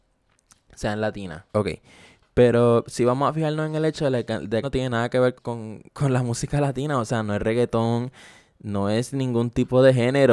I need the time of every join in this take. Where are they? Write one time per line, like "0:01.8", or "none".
0:01.5
0:04.6
0:05.3
0:05.9

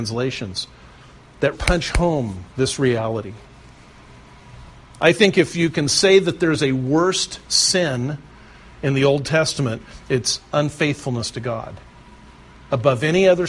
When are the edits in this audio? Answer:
0:01.5
0:02.5

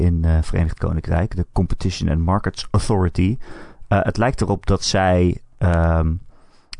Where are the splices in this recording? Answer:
none

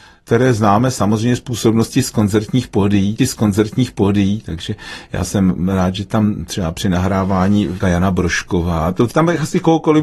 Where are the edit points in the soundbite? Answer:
0:03.2
0:07.8

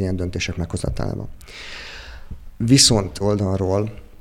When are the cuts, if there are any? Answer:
0:03.2

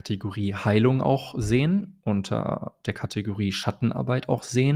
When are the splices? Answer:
none

